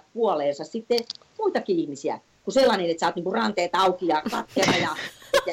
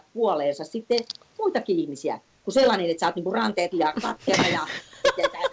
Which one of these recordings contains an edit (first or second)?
second